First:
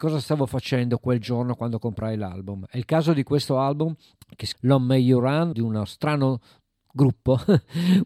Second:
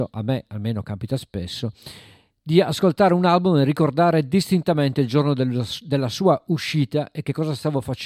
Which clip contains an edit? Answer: first; 3 cuts; at 4.2 s, 4.5 s, 5.5 s

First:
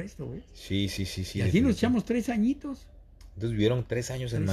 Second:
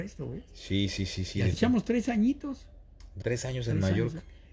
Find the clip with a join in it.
second; 2 cuts; at 1.5 s, 3.2 s

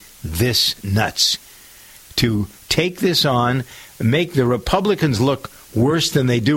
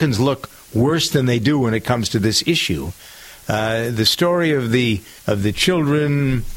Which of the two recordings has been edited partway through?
second; 1 cut; at 5.2 s

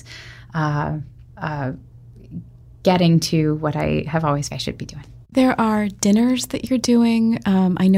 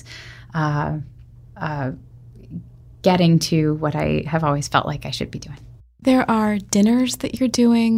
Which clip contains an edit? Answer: first; 3 cuts; at 1.3 s, 4.5 s, 5.2 s

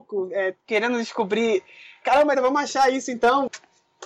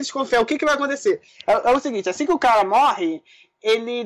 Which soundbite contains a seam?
first; 1 cut; at 2.3 s

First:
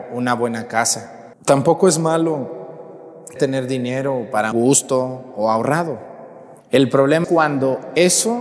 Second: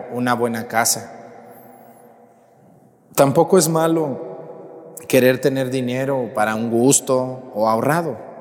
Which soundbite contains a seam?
first; 5 cuts; at 1.3 s, 3.4 s, 4.5 s, 6.6 s, 7.2 s

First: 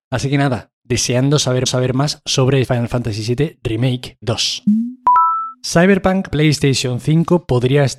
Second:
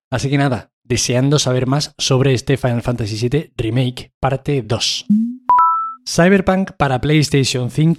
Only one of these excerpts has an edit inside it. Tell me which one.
first; 4 cuts; at 1.7 s, 2.6 s, 4.2 s, 6.3 s

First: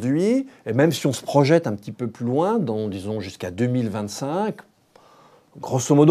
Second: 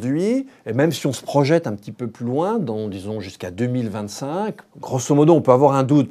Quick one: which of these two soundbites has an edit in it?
second; 1 cut; at 4.7 s

